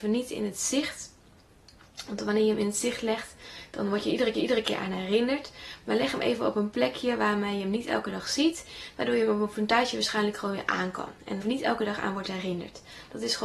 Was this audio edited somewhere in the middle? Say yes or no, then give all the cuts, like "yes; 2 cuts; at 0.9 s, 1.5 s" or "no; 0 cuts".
yes; 2 cuts; at 4.3 s, 11.4 s